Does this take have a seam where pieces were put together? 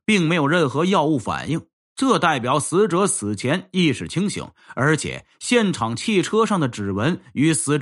no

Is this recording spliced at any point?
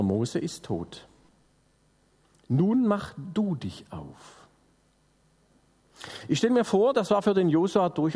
no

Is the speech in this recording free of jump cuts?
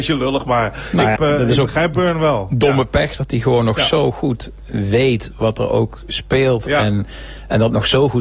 no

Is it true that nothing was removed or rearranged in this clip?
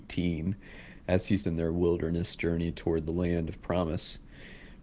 no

